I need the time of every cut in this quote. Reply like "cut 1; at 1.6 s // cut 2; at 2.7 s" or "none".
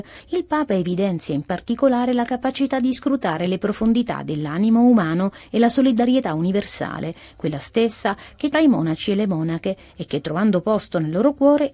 cut 1; at 8.5 s